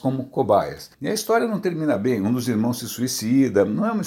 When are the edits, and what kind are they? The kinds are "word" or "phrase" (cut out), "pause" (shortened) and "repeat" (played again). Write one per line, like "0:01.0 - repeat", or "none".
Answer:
0:00.9 - pause